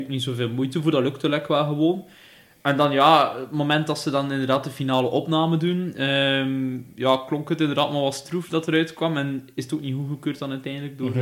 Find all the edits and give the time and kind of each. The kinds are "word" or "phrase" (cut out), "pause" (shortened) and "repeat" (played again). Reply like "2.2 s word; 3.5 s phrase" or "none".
none